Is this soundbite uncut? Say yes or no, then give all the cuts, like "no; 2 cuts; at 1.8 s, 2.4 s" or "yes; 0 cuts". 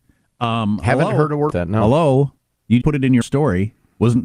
no; 3 cuts; at 1.5 s, 2.8 s, 3.2 s